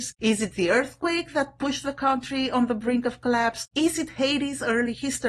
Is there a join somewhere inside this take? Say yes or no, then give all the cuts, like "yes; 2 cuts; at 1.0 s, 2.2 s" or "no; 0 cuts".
no; 0 cuts